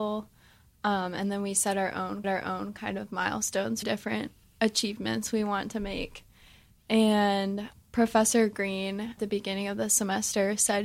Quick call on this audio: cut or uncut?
cut